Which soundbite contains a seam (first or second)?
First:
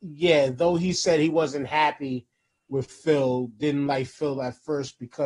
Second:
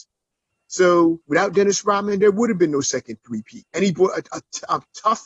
second